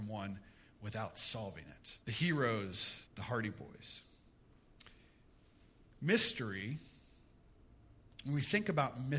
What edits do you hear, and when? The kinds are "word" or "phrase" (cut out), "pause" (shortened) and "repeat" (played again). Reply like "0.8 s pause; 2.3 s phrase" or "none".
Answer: 2.0 s pause; 3.1 s pause